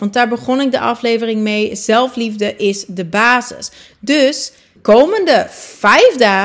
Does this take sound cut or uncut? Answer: cut